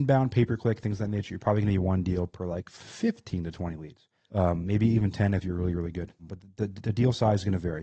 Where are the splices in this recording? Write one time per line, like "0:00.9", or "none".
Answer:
none